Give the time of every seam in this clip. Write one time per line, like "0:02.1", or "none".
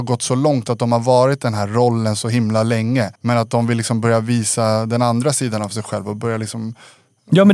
0:03.1